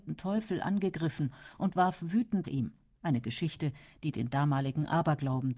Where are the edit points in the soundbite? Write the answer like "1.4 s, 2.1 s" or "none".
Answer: 2.4 s